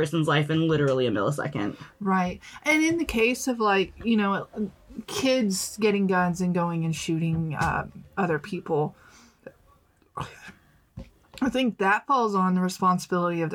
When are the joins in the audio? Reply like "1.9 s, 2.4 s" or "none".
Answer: none